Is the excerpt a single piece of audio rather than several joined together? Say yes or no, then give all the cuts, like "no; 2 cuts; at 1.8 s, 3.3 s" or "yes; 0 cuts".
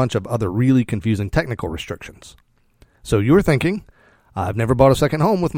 yes; 0 cuts